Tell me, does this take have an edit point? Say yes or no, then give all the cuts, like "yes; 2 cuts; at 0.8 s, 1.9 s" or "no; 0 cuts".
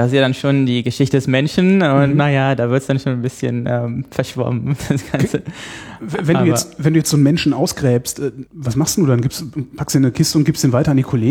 yes; 1 cut; at 8.5 s